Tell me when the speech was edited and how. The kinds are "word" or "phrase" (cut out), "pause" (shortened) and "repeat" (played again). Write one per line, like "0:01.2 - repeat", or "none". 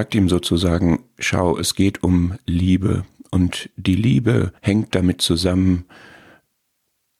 0:04.6 - pause